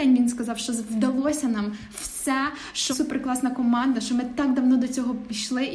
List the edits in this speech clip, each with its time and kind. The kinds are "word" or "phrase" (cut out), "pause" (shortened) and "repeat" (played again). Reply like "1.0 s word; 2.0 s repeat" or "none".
2.9 s word